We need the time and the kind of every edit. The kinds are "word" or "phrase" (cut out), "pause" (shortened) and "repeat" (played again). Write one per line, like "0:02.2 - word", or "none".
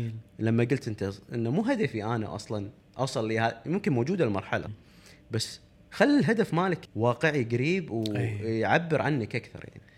0:04.7 - word
0:06.8 - word

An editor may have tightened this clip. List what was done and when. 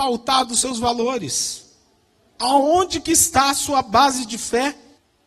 none

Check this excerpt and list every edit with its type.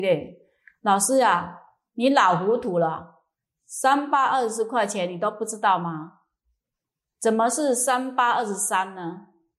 none

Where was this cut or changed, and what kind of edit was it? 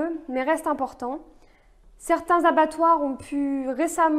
none

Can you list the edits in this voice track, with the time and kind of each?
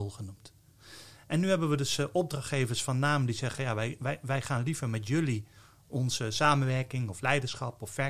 none

